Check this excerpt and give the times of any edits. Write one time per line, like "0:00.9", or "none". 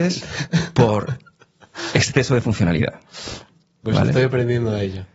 none